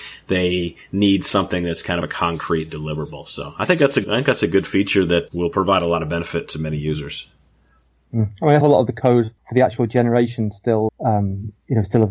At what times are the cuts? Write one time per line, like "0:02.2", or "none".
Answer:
0:02.0
0:04.0
0:05.3
0:08.6
0:09.4
0:10.9